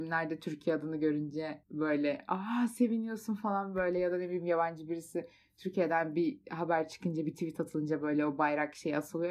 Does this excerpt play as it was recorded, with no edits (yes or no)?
yes